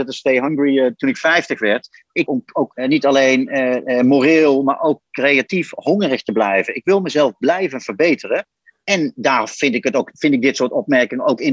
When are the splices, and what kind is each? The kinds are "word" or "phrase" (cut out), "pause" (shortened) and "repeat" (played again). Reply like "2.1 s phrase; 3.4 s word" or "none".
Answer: 2.3 s phrase